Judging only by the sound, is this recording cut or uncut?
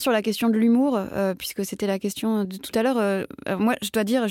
cut